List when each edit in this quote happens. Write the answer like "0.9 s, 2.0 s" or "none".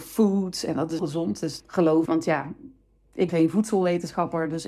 1.0 s, 1.6 s, 2.0 s, 3.3 s